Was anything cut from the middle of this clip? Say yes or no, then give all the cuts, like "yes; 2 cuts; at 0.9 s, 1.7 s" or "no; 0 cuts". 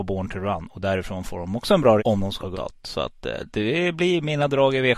yes; 2 cuts; at 2.0 s, 2.5 s